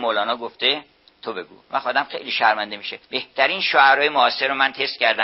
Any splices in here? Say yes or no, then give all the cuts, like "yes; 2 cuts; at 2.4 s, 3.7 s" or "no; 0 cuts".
yes; 2 cuts; at 1.6 s, 3.0 s